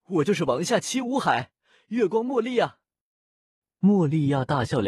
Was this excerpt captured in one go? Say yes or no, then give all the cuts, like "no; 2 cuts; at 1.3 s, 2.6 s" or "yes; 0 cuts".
yes; 0 cuts